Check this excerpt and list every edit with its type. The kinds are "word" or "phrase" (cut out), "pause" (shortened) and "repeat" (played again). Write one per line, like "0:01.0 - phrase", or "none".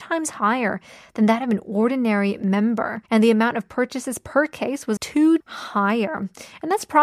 0:03.1 - pause
0:05.0 - word
0:05.4 - word